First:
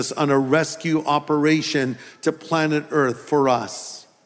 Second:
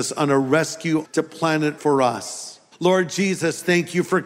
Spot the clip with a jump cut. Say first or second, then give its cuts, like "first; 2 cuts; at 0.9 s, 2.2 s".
second; 3 cuts; at 1.0 s, 1.8 s, 2.7 s